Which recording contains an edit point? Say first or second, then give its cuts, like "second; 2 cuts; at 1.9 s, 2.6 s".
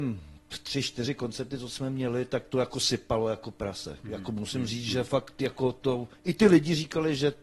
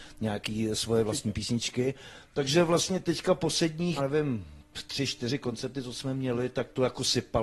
second; 1 cut; at 4.0 s